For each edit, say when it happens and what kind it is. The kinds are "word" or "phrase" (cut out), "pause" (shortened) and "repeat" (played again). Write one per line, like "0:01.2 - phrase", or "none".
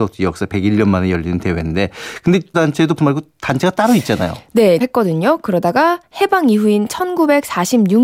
0:02.5 - word
0:03.0 - word
0:04.8 - phrase